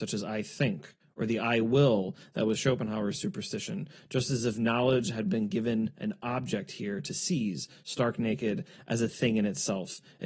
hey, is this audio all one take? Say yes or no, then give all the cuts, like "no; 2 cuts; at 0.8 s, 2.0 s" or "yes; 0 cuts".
yes; 0 cuts